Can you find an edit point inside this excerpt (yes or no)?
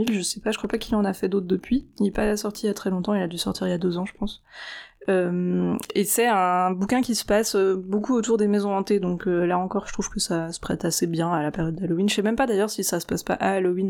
no